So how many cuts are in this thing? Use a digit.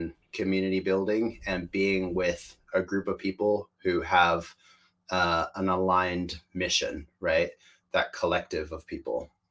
0